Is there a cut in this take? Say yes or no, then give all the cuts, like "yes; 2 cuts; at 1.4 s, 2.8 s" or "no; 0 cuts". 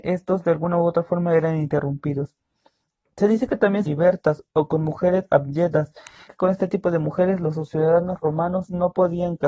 yes; 2 cuts; at 3.8 s, 6.3 s